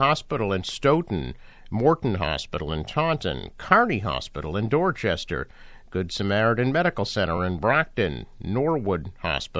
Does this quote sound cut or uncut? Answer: uncut